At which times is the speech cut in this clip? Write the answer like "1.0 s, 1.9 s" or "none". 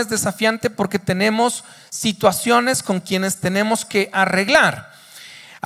none